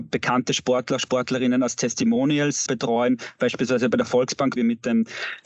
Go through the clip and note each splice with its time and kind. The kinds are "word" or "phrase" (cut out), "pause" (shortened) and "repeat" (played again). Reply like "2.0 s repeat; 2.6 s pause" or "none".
2.7 s word; 4.6 s word